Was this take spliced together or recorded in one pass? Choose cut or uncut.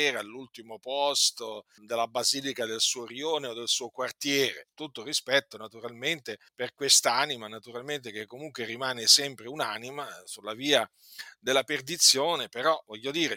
cut